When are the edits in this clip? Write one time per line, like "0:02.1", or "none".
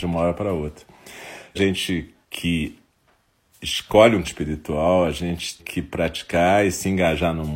0:01.6
0:02.2
0:04.2
0:05.6